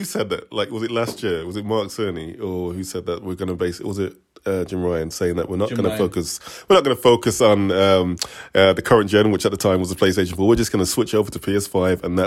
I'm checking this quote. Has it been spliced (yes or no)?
no